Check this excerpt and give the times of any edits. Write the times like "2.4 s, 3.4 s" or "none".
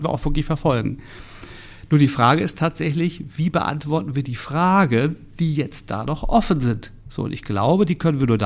7.0 s

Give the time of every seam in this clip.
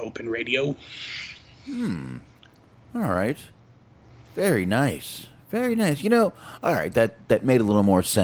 none

